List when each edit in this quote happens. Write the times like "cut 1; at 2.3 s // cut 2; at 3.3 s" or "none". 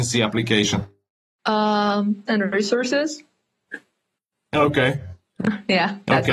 cut 1; at 2.3 s